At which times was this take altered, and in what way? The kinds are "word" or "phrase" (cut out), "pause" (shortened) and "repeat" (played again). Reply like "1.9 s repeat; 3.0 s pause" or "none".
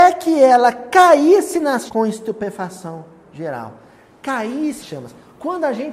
1.9 s word; 4.8 s word